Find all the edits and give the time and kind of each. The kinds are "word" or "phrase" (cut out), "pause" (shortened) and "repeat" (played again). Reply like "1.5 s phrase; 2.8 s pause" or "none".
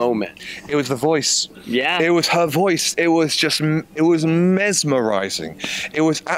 none